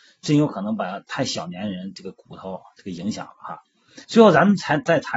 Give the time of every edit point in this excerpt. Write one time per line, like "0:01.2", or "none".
0:04.0